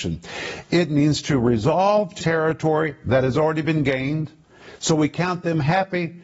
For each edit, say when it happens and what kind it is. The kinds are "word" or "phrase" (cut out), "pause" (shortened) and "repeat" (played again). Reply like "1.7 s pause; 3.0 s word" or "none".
2.2 s word

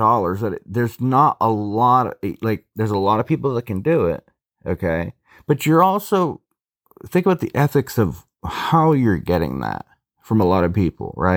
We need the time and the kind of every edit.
none

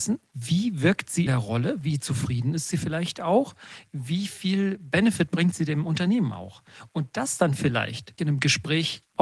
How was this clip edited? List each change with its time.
1.3 s word; 8.2 s word

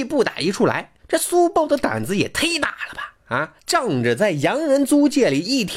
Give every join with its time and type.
1.0 s pause; 3.6 s pause

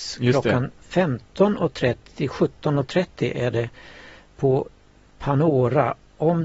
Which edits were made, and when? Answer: none

